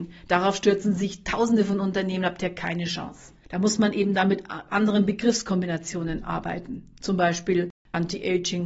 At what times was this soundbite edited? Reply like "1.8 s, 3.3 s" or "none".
3.4 s